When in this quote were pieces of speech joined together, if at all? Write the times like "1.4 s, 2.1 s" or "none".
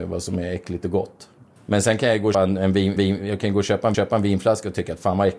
1.6 s, 2.3 s, 3.0 s, 3.9 s